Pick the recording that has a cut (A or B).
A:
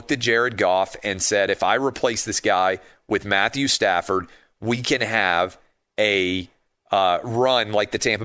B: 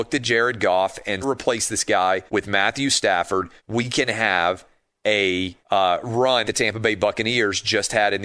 B